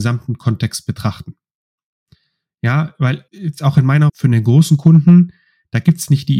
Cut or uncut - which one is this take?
cut